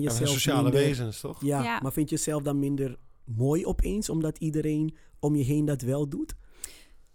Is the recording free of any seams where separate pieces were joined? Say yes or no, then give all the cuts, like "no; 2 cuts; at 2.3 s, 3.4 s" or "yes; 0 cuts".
yes; 0 cuts